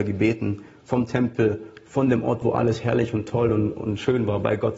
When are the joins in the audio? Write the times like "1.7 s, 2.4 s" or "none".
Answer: none